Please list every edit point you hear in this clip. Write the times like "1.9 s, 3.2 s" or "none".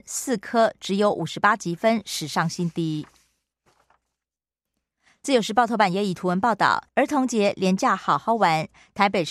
6.9 s